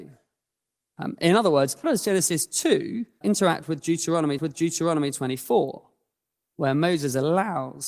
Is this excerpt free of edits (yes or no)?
no